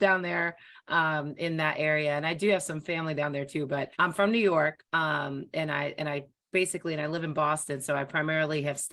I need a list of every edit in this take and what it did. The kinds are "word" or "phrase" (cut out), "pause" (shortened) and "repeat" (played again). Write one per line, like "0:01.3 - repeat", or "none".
0:03.9 - pause
0:04.9 - pause